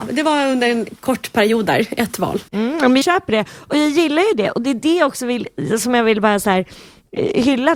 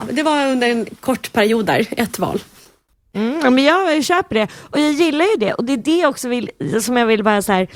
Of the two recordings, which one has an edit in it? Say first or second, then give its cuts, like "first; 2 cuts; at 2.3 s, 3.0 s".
first; 2 cuts; at 2.5 s, 3.0 s